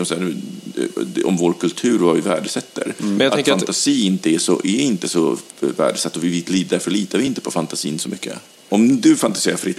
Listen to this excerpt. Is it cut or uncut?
uncut